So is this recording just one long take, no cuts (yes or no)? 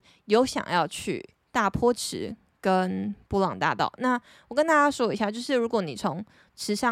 yes